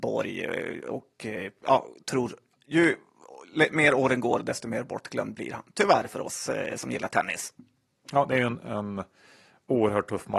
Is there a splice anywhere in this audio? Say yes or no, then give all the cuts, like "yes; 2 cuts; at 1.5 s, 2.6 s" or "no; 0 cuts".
no; 0 cuts